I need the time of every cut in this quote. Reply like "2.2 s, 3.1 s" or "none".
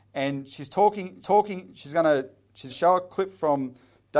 1.2 s, 2.7 s